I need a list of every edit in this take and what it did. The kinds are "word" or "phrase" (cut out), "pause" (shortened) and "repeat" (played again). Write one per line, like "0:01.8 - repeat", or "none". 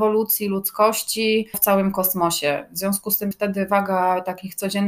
0:01.5 - word
0:03.3 - word